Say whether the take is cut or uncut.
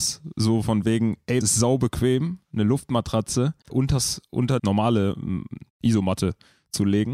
cut